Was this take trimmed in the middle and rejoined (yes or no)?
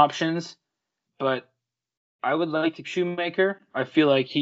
yes